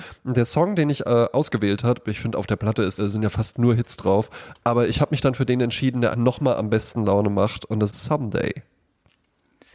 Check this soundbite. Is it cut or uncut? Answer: cut